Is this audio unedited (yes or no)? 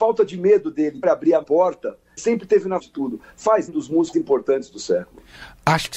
no